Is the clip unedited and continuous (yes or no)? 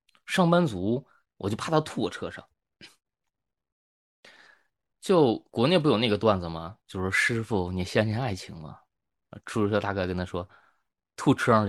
yes